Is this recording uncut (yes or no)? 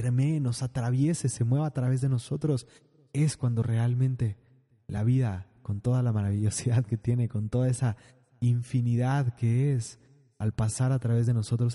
yes